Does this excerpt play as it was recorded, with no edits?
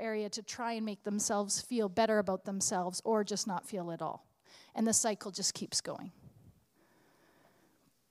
yes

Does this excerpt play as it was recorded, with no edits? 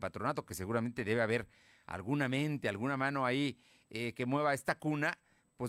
yes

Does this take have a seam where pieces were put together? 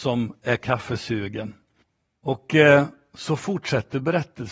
yes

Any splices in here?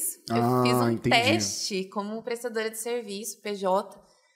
no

